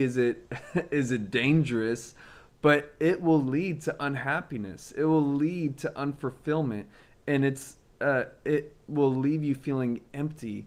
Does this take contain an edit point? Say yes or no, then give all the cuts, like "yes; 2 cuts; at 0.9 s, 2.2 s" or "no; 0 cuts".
no; 0 cuts